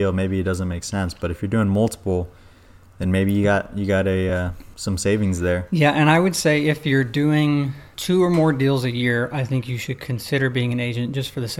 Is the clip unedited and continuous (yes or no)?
yes